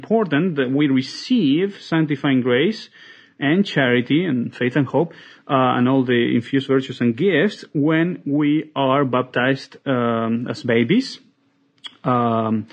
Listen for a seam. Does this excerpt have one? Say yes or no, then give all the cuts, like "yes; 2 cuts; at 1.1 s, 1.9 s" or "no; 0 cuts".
no; 0 cuts